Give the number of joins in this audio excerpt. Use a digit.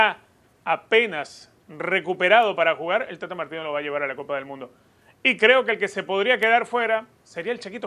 0